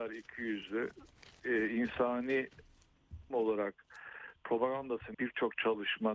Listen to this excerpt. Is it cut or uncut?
cut